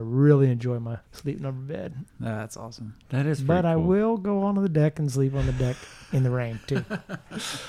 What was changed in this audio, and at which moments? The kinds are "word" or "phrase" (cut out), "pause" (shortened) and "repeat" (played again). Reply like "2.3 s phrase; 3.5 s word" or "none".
1.0 s pause; 2.1 s pause